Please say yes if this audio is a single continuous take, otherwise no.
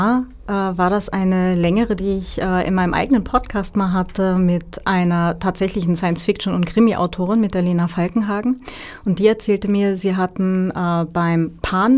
no